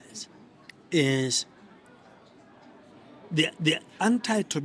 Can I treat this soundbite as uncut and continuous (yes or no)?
no